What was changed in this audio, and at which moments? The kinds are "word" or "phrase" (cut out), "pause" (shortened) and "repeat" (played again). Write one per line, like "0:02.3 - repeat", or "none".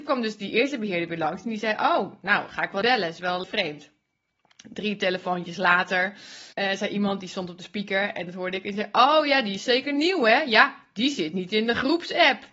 0:02.8 - word
0:03.4 - word
0:06.5 - pause